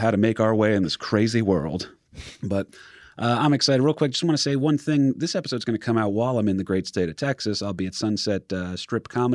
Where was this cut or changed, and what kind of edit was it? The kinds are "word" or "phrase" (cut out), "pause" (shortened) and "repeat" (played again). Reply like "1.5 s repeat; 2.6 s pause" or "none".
2.4 s pause